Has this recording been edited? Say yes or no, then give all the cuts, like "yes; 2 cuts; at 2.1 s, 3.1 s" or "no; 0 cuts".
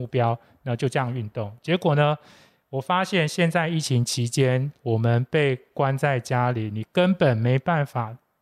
no; 0 cuts